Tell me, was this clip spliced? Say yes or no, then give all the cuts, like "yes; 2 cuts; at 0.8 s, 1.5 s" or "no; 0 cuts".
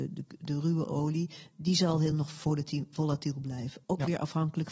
no; 0 cuts